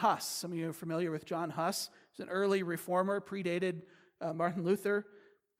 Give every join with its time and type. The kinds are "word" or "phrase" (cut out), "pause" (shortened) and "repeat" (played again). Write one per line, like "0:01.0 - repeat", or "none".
none